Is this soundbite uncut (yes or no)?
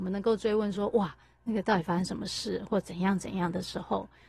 yes